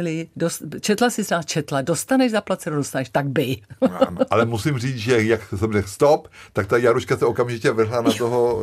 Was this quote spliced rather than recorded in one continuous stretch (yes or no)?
no